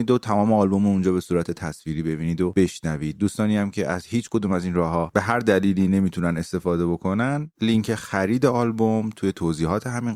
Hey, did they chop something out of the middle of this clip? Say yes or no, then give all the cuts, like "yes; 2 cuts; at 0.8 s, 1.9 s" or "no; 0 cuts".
no; 0 cuts